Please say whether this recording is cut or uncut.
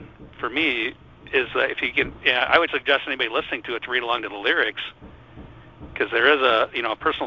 cut